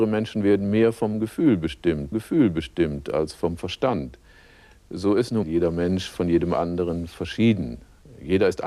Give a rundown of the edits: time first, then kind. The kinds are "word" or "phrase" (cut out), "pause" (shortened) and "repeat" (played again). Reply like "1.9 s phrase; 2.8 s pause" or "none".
2.1 s repeat; 5.4 s word